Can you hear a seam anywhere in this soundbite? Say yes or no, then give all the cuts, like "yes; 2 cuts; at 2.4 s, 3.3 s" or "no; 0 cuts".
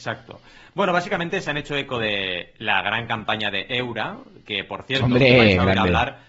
no; 0 cuts